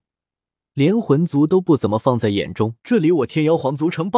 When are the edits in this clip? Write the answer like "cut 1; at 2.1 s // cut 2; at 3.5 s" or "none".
cut 1; at 2.8 s